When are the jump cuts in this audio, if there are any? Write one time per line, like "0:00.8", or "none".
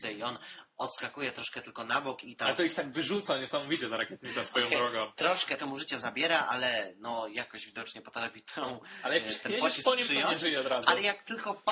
0:05.6